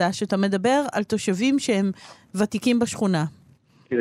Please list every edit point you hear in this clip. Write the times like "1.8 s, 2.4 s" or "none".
none